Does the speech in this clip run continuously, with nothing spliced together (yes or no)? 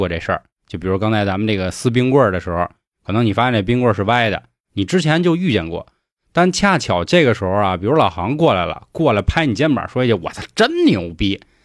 yes